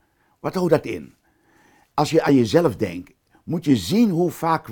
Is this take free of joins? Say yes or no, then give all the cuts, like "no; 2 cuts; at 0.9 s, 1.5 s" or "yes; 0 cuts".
yes; 0 cuts